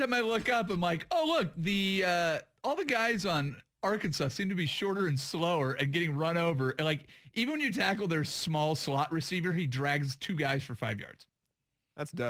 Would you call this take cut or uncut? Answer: uncut